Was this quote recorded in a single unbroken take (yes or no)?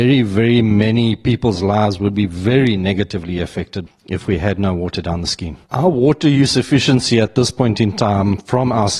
no